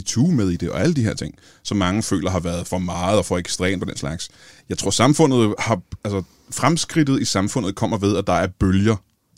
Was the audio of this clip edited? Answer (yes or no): no